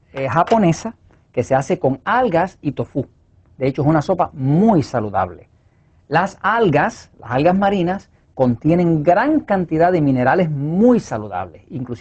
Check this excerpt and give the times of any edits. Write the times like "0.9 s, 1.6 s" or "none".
none